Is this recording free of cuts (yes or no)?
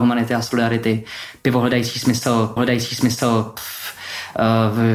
no